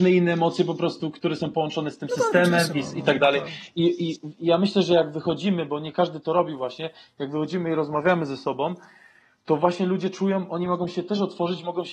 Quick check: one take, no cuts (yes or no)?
yes